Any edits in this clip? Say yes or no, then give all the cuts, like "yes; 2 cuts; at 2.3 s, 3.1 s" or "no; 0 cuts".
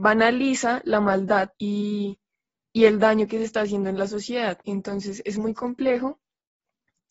yes; 2 cuts; at 1.5 s, 4.6 s